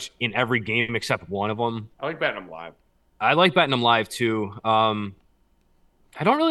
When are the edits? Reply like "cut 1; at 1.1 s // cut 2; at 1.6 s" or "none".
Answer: cut 1; at 1.9 s